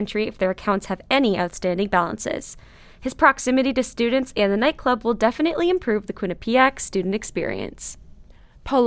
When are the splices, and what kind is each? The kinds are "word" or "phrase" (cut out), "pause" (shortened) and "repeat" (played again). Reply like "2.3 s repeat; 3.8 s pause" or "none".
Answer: none